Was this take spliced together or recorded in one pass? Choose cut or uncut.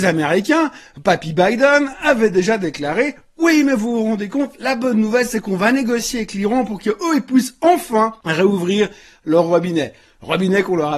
uncut